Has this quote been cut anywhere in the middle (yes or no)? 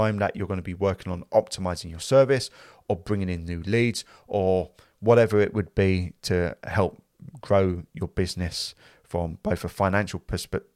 no